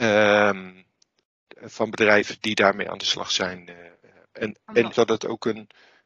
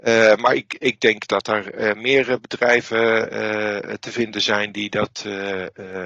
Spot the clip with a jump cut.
first; 2 cuts; at 2.4 s, 4.9 s

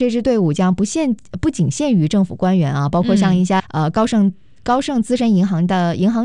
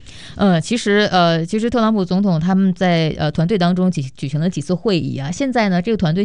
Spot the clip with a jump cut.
first; 1 cut; at 3.6 s

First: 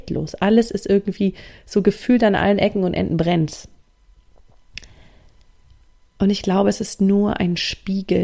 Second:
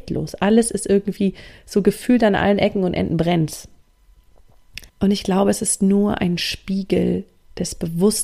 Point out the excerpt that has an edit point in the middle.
second; 1 cut; at 4.9 s

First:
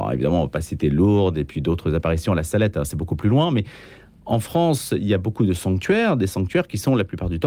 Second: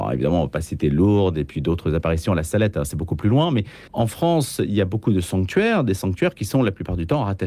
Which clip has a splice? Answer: second; 1 cut; at 3.9 s

